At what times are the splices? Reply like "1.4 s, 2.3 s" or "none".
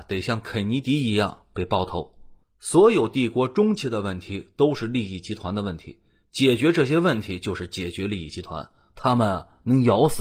2.4 s